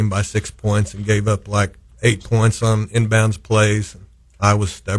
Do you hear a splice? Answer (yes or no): no